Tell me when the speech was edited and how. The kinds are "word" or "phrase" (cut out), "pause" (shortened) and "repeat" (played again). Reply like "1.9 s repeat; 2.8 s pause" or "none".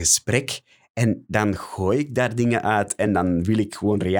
none